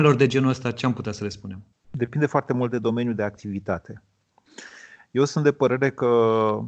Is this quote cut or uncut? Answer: uncut